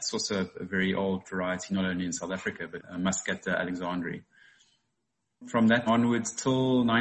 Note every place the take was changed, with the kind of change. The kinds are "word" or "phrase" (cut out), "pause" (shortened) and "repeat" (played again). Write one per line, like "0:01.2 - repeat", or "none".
0:01.2 - word
0:02.8 - word
0:05.9 - word